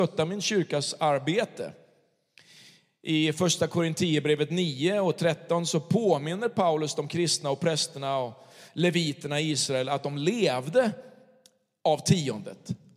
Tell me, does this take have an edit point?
no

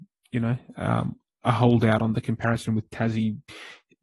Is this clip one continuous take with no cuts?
yes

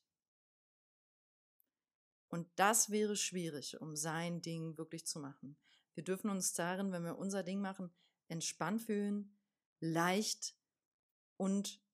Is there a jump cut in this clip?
no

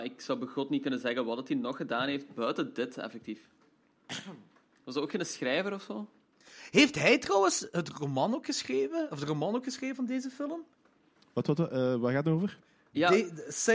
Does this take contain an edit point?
no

